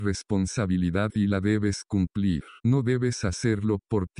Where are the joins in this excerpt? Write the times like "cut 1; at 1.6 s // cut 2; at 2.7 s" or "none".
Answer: cut 1; at 2.6 s